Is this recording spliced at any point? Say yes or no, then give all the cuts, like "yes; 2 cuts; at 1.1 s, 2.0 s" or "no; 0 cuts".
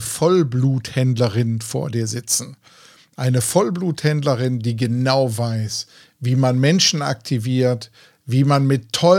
no; 0 cuts